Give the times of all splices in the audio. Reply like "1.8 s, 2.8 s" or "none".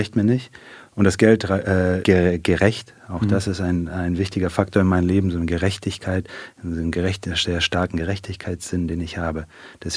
2.0 s